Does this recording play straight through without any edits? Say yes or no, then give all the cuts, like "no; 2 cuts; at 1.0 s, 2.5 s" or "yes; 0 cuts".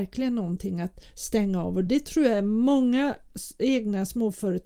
yes; 0 cuts